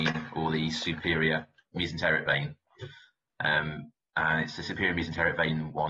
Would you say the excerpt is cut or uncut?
uncut